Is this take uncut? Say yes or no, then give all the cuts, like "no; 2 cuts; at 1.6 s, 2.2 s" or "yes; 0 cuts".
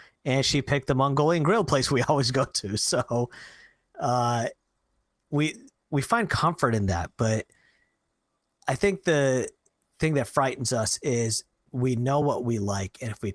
yes; 0 cuts